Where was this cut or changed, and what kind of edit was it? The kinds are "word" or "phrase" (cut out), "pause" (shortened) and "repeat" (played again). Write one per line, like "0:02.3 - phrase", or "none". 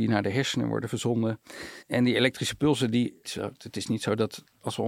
0:01.8 - pause
0:03.2 - phrase